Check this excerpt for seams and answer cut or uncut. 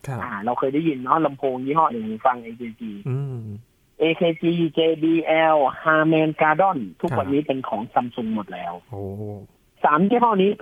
cut